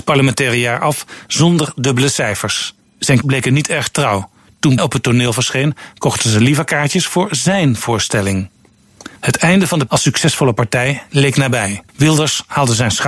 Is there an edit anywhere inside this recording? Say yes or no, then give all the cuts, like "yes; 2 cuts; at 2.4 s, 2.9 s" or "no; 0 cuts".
yes; 5 cuts; at 3.2 s, 4.8 s, 9.2 s, 9.9 s, 11.9 s